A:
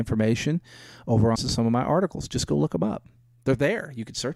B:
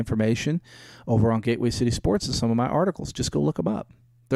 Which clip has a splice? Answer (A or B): A